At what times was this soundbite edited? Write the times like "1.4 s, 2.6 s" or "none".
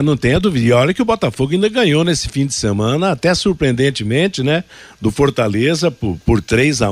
none